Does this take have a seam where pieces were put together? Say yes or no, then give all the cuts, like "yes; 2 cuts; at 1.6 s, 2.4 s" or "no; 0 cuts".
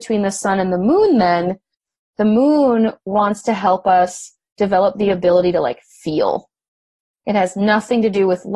no; 0 cuts